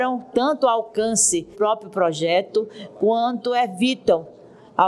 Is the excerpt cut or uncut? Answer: cut